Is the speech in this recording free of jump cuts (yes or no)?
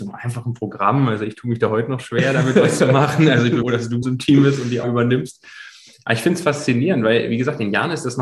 no